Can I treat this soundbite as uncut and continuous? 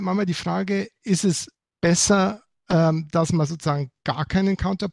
yes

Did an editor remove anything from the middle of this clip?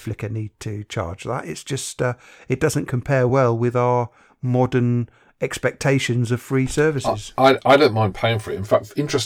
no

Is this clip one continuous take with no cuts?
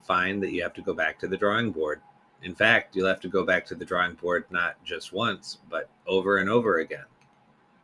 yes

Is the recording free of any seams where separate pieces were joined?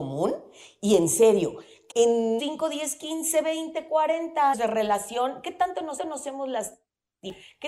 no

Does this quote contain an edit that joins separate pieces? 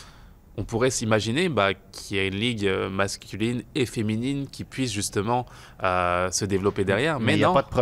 no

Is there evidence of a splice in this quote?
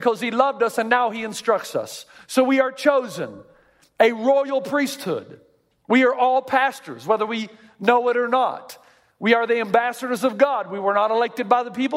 no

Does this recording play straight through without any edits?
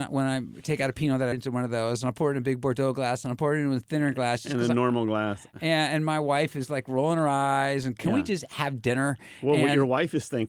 no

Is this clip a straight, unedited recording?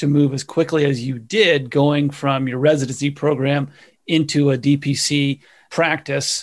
yes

